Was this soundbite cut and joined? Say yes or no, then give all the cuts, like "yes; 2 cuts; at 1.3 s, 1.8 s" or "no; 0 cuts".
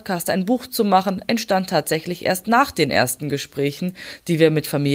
no; 0 cuts